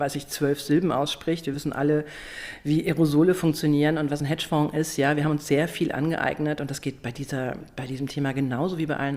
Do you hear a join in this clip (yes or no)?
no